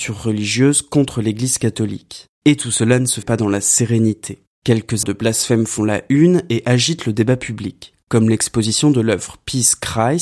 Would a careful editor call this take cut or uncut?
cut